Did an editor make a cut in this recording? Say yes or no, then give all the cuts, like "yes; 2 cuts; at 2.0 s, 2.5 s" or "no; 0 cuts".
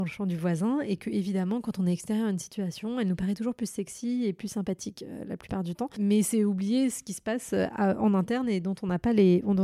no; 0 cuts